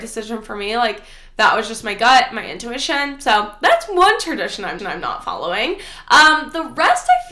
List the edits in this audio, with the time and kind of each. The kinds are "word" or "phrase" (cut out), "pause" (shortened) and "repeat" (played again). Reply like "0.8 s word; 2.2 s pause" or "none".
4.8 s repeat